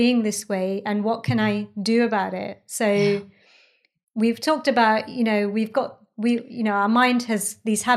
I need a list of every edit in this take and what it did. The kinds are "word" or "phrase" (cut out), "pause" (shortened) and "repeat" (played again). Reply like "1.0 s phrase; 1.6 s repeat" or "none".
none